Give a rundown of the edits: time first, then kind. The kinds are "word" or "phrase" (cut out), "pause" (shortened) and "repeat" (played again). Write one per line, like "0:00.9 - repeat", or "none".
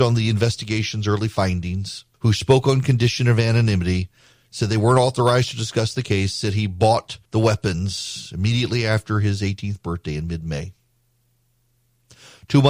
0:02.1 - pause
0:07.2 - pause